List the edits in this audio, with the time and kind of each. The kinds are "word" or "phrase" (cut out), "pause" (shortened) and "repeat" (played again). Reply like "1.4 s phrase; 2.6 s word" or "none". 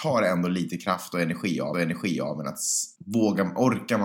1.7 s repeat; 3.0 s pause